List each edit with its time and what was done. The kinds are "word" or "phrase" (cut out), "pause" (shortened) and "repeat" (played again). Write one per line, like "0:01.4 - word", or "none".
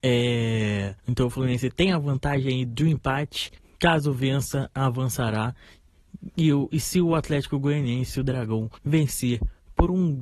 0:01.0 - pause
0:03.6 - pause
0:08.8 - pause